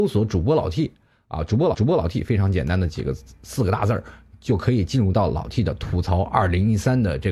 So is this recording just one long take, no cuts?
no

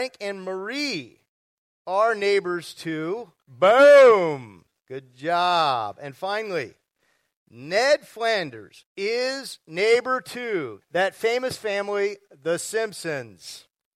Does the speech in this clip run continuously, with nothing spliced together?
no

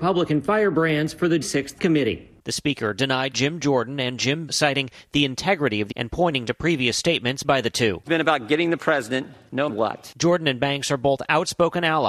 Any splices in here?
yes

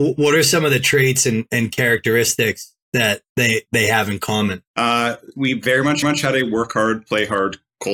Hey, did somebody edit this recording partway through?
yes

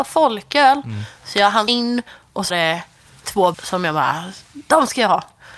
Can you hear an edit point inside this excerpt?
yes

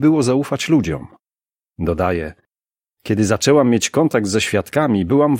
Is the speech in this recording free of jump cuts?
yes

